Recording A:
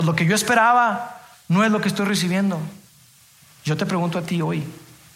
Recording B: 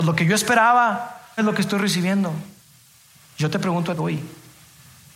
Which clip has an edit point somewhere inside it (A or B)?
B